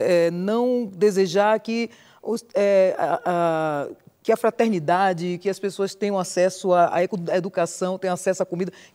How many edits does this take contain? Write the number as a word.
zero